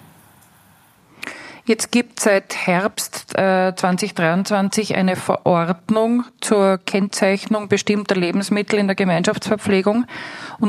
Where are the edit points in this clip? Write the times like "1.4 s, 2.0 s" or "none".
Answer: none